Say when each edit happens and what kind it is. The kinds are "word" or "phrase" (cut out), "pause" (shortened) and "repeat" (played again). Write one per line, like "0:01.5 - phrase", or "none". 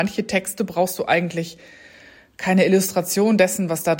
none